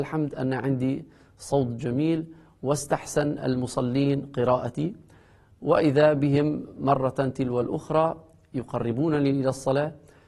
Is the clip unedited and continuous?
yes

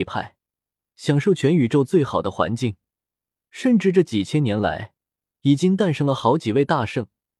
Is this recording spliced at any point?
no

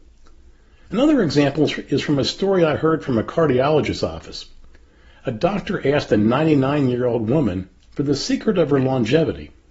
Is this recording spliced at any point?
no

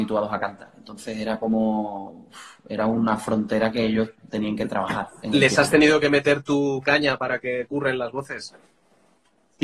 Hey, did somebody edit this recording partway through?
no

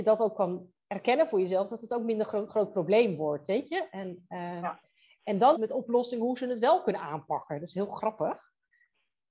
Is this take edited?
yes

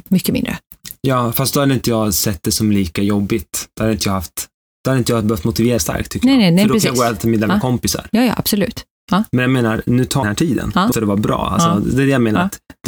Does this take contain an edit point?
yes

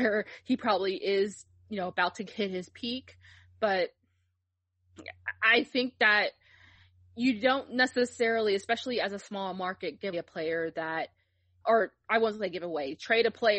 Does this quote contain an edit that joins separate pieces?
yes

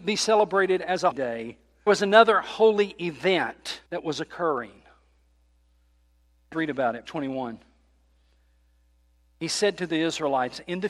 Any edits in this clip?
yes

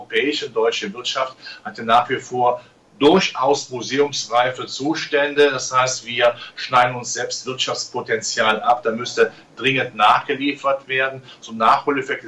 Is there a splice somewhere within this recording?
no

